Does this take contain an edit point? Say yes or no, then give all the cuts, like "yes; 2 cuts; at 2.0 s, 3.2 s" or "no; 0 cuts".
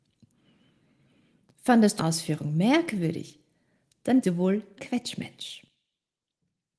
yes; 3 cuts; at 2.0 s, 4.2 s, 4.8 s